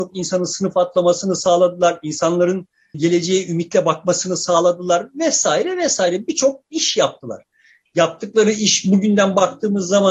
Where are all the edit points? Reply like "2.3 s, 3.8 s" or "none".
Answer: none